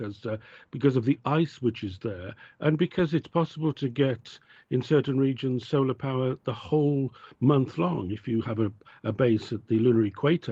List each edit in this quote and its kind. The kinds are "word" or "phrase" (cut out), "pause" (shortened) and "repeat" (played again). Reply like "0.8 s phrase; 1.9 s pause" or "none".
none